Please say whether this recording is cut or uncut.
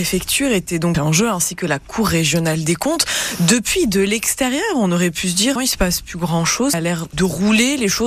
cut